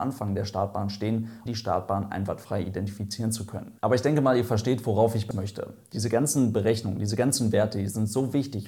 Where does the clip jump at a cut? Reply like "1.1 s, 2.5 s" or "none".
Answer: 1.5 s, 3.8 s, 5.3 s